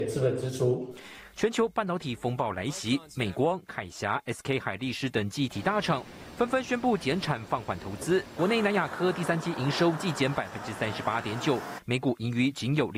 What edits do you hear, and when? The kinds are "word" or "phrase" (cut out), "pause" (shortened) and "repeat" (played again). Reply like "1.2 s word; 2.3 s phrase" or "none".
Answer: none